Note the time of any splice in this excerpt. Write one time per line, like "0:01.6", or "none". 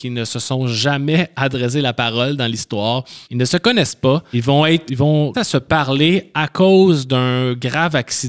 0:03.2
0:04.3
0:04.9
0:05.3